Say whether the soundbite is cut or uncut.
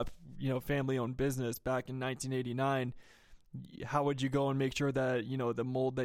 uncut